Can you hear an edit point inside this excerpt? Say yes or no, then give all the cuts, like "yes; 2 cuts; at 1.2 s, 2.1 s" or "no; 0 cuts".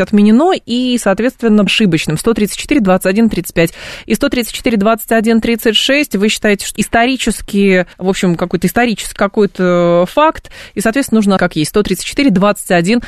yes; 5 cuts; at 1.7 s, 6.8 s, 7.9 s, 9.2 s, 11.4 s